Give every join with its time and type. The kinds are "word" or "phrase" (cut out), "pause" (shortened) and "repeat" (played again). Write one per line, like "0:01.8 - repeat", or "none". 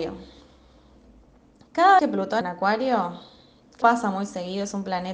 0:02.0 - word
0:02.4 - word
0:03.8 - word

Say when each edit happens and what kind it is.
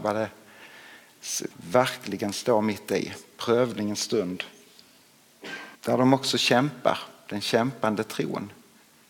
0:01.5 - word
0:05.7 - pause

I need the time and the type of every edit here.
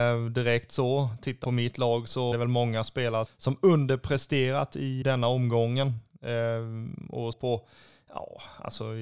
0:01.4 - word
0:02.3 - word
0:03.3 - word
0:05.0 - word
0:07.3 - word

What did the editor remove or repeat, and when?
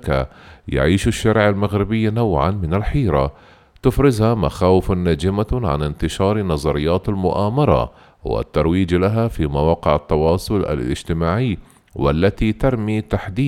none

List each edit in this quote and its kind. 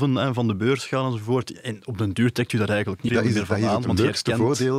0:03.1 - word

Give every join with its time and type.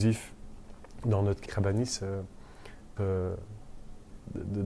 0:01.5 - word
0:03.0 - phrase

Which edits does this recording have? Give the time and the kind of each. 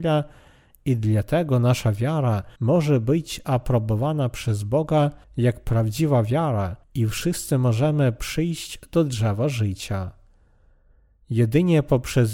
0:02.6 - pause
0:05.2 - pause
0:06.8 - pause

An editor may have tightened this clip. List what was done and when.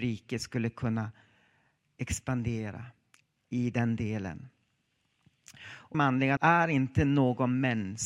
0:03.1 - pause
0:05.9 - phrase
0:06.4 - word

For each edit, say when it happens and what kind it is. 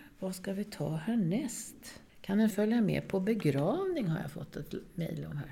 0:02.1 - pause
0:02.5 - word

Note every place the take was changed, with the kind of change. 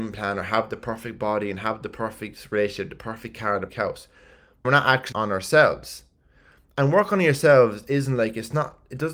0:03.7 - word
0:04.6 - word
0:05.1 - word

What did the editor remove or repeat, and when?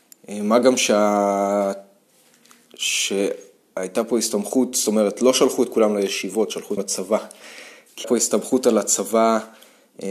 0:06.8 - word
0:08.0 - word

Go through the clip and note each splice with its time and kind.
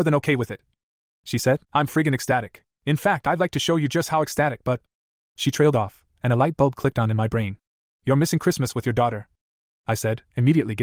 0:01.6 - pause
0:02.7 - pause

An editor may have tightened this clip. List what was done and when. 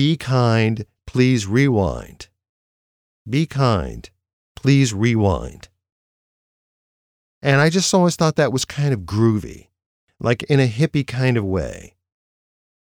none

